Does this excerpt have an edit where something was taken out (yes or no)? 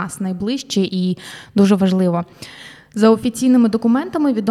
no